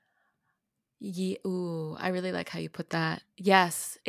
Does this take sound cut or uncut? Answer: uncut